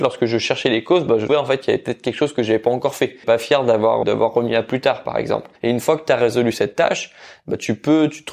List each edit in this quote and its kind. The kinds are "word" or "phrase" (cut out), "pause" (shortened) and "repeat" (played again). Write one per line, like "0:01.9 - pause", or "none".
0:01.3 - word
0:03.2 - phrase
0:04.0 - word
0:05.6 - pause